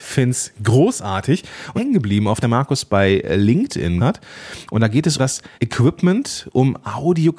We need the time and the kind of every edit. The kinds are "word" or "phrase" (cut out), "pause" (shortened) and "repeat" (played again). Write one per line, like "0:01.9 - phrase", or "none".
0:01.8 - phrase
0:02.4 - phrase
0:04.0 - word
0:05.2 - word
0:05.5 - pause